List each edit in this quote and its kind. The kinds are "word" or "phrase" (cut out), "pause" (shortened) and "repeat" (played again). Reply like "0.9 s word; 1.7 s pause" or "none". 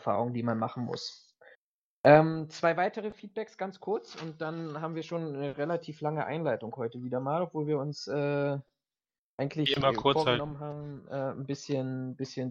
none